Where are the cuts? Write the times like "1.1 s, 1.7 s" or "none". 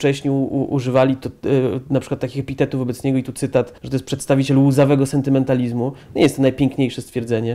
3.8 s